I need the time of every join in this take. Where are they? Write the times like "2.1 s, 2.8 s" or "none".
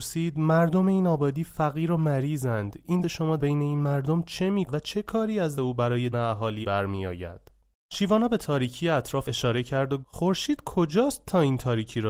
3.0 s, 3.4 s, 4.7 s, 5.6 s, 6.1 s, 6.6 s, 9.2 s, 10.0 s